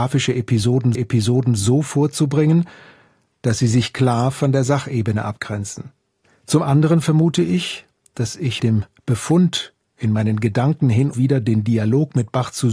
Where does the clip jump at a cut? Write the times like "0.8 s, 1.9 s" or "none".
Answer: 0.9 s, 6.2 s, 8.6 s, 11.1 s